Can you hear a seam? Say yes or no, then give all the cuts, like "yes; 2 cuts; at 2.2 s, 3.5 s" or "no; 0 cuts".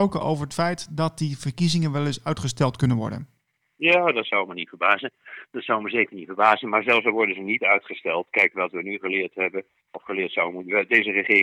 no; 0 cuts